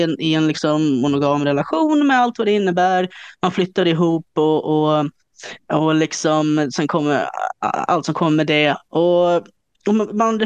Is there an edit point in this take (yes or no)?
no